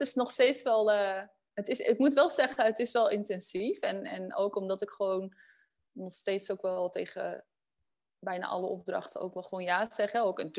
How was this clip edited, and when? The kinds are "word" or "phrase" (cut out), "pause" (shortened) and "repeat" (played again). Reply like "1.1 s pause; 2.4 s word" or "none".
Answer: none